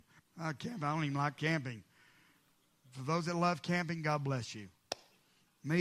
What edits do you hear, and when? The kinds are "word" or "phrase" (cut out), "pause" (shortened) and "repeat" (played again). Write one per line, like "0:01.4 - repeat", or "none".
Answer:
none